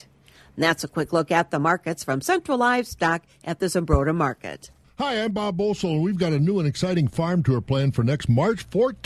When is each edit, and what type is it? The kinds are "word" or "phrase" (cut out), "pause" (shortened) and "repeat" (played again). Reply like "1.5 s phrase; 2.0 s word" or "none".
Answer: none